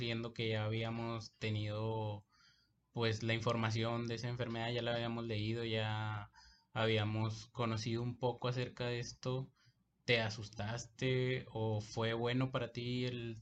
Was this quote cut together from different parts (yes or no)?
no